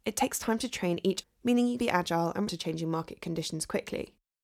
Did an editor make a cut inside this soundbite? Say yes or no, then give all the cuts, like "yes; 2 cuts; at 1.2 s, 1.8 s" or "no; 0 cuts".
yes; 3 cuts; at 1.2 s, 1.8 s, 2.5 s